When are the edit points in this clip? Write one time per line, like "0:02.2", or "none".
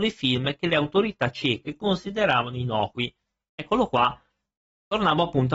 none